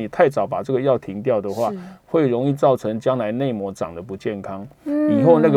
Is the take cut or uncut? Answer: uncut